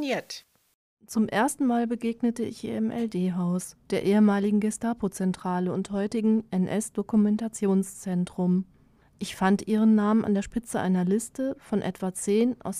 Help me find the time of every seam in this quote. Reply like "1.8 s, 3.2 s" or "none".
none